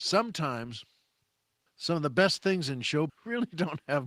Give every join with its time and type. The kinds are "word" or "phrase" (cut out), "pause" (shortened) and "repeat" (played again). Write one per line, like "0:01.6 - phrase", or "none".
0:01.7 - word
0:03.1 - word